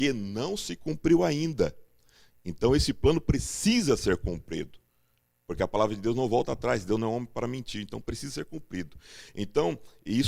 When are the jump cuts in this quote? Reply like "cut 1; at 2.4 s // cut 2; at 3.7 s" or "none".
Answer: none